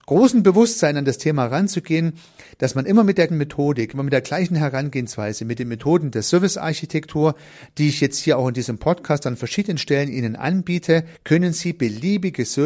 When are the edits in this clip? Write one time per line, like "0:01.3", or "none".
0:03.3
0:11.1